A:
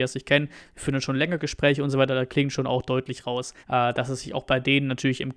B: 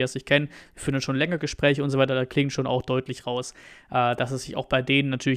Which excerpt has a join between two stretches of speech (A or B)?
A